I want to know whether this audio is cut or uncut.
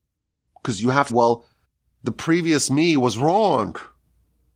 cut